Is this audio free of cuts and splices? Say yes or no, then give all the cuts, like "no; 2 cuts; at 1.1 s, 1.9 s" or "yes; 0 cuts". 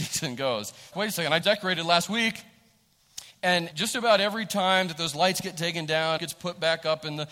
no; 4 cuts; at 0.9 s, 1.4 s, 3.7 s, 6.2 s